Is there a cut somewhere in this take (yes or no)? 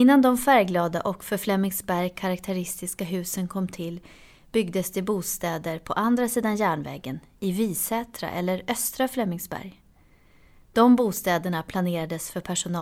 no